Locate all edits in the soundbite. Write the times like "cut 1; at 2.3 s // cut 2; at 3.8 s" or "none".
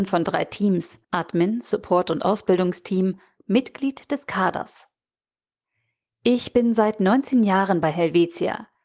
cut 1; at 1.0 s